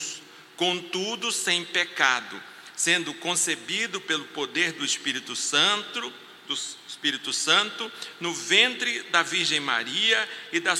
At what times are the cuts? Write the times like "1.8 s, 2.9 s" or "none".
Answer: none